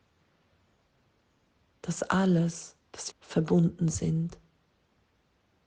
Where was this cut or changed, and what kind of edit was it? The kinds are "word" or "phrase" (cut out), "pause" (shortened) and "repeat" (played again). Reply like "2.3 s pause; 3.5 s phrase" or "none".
3.1 s phrase